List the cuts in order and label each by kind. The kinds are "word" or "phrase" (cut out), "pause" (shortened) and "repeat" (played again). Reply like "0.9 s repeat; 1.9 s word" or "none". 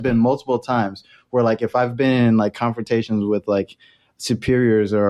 none